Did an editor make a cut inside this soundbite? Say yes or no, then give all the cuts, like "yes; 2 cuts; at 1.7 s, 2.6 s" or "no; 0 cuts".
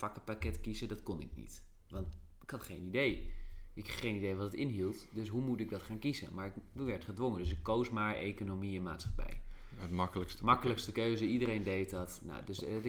no; 0 cuts